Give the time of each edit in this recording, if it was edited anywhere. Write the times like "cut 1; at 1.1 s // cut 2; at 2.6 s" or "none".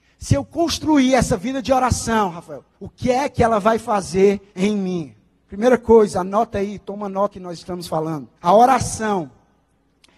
cut 1; at 2.7 s // cut 2; at 4.5 s // cut 3; at 7.3 s // cut 4; at 8.4 s